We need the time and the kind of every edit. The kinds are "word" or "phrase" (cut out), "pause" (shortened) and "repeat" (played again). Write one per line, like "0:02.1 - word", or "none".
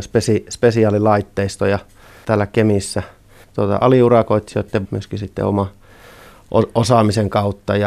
0:02.2 - word
0:03.4 - word
0:04.8 - word